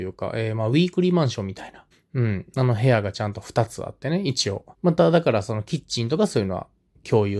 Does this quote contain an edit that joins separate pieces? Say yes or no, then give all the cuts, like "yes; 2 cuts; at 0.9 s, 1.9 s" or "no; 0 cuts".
yes; 2 cuts; at 1.9 s, 4.7 s